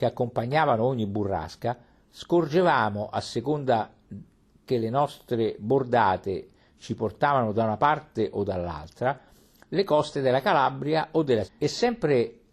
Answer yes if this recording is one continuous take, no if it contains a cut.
no